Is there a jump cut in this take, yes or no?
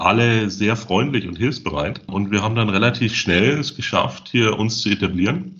no